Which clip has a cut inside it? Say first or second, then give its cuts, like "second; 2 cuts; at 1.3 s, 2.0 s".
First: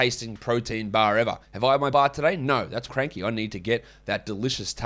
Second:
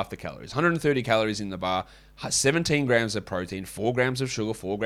first; 3 cuts; at 1.4 s, 1.9 s, 2.9 s